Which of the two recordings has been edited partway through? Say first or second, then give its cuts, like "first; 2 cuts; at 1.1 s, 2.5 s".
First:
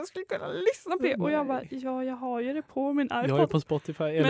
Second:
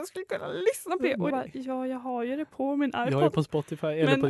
second; 1 cut; at 1.3 s